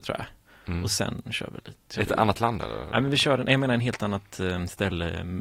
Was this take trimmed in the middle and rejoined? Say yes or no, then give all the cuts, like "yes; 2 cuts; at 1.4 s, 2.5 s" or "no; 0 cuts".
no; 0 cuts